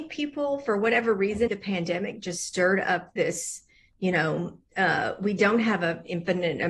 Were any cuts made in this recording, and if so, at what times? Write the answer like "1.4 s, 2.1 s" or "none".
1.5 s, 4.6 s

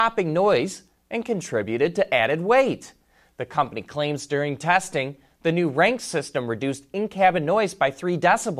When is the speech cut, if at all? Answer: none

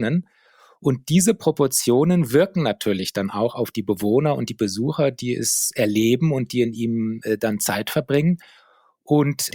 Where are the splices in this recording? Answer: none

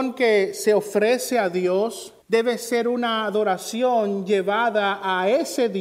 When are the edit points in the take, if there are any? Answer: 2.2 s

